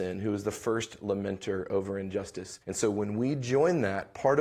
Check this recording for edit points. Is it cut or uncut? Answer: cut